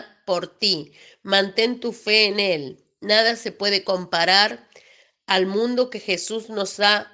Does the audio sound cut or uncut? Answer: uncut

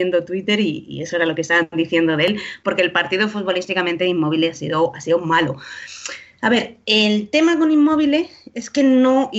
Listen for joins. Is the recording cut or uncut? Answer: uncut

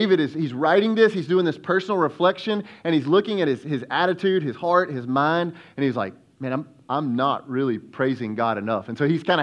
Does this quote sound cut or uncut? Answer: uncut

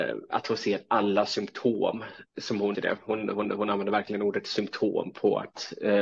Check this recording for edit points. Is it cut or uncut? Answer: cut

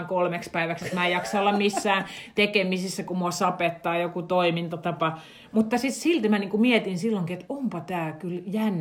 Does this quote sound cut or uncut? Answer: uncut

